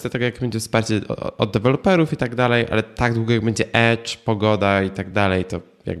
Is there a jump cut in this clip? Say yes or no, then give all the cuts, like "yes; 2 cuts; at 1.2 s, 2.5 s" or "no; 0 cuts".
no; 0 cuts